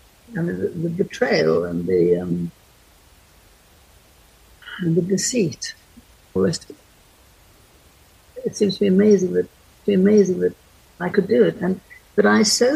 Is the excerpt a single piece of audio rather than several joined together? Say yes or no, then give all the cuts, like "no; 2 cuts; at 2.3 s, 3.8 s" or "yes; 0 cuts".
no; 2 cuts; at 6.4 s, 9.8 s